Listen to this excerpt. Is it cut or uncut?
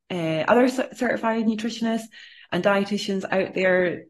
uncut